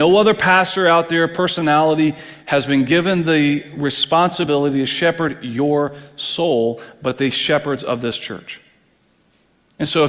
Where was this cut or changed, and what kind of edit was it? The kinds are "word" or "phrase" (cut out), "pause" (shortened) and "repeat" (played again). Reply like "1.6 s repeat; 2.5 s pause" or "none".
none